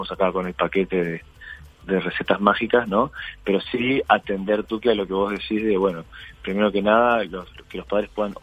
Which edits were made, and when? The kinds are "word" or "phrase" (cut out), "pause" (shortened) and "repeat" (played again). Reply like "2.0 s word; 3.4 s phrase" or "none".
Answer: none